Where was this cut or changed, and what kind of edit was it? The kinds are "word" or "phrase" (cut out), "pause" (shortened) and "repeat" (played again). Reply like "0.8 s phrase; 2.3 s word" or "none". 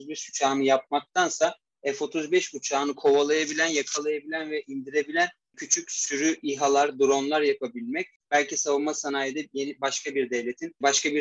none